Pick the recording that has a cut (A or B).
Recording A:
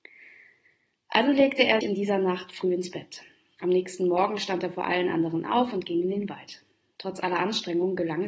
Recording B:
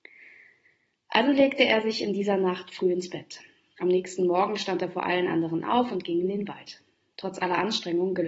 A